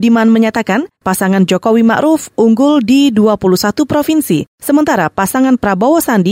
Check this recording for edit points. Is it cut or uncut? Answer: cut